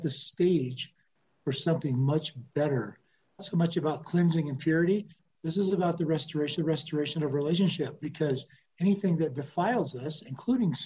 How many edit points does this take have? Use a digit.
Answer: 2